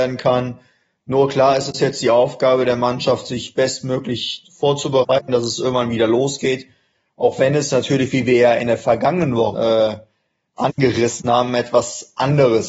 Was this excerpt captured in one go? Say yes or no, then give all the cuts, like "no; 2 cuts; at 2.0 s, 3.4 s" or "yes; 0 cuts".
no; 2 cuts; at 4.4 s, 9.5 s